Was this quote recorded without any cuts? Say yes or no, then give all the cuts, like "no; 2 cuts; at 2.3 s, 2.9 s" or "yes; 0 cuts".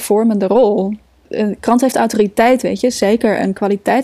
yes; 0 cuts